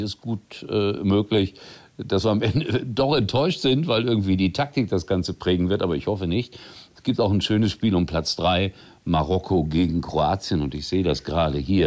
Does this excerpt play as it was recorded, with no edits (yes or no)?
yes